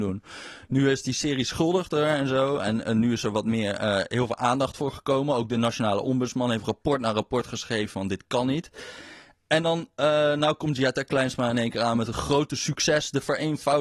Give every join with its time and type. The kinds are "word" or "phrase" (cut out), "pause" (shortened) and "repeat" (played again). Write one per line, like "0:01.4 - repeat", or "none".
none

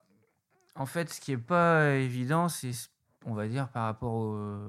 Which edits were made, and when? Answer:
none

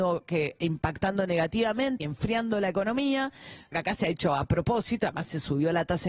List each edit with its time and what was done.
0:02.0 - word
0:03.7 - word

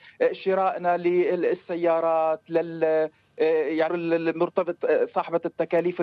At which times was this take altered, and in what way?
0:03.9 - word

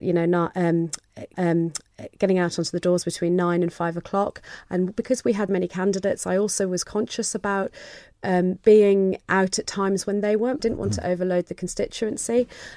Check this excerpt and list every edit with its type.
0:01.3 - repeat
0:05.5 - word
0:06.8 - word
0:10.6 - phrase

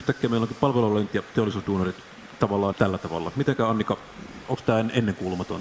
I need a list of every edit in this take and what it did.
0:01.1 - word
0:02.7 - phrase

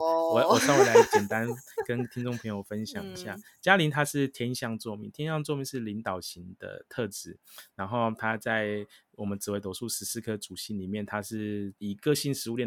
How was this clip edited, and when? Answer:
none

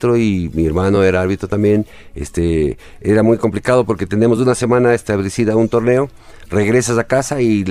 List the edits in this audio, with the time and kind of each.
none

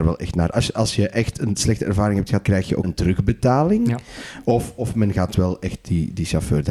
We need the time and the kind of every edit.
0:02.4 - word
0:02.8 - phrase

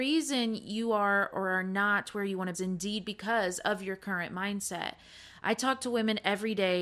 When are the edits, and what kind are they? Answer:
0:02.5 - phrase

